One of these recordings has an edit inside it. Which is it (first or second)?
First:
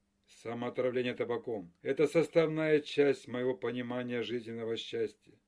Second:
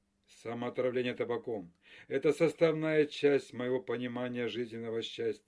first